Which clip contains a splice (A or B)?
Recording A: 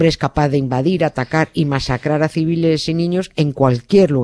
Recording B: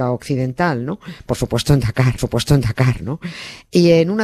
B